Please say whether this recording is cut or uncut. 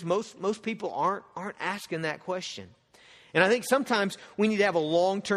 uncut